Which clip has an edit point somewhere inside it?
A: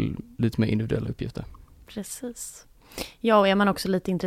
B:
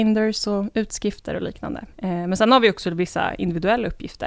B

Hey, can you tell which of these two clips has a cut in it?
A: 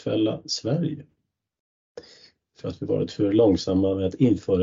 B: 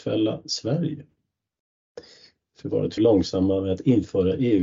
B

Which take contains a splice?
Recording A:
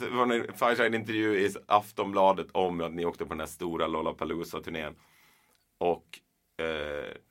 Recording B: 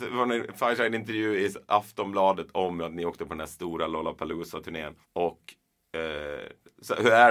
B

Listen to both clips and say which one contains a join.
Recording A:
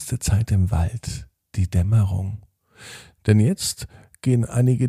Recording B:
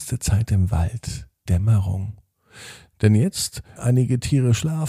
B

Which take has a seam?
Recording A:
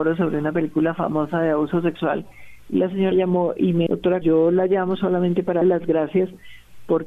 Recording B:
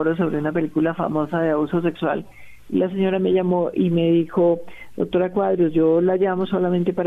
A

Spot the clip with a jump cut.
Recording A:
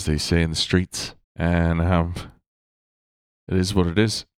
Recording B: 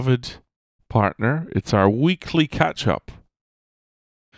A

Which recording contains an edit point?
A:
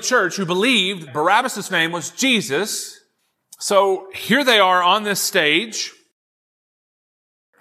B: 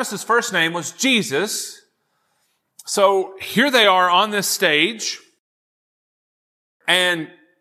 A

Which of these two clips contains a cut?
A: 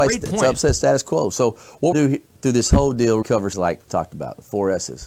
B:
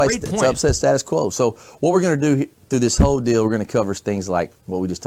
A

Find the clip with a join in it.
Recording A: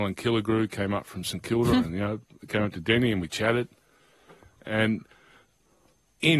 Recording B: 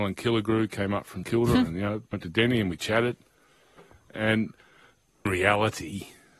B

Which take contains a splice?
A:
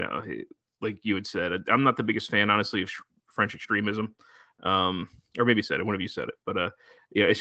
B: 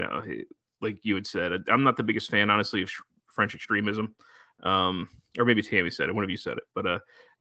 A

